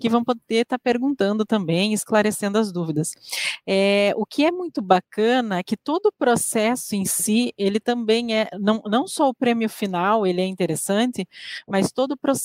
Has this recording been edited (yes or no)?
no